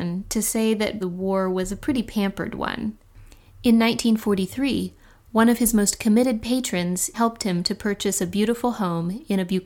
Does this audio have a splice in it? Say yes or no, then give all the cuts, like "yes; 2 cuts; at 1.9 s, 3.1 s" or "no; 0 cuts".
yes; 2 cuts; at 1.0 s, 7.1 s